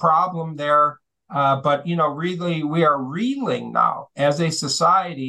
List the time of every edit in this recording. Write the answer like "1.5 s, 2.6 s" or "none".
none